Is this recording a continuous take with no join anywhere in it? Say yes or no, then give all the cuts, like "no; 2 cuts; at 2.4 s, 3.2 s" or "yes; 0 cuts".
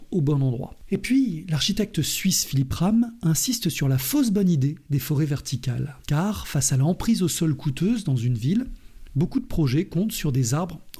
no; 1 cut; at 6.0 s